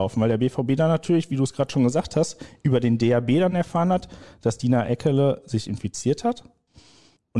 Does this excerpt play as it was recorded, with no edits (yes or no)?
yes